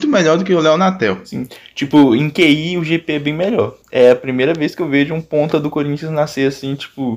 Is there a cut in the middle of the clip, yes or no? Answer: yes